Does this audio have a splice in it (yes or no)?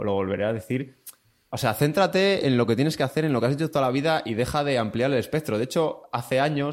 no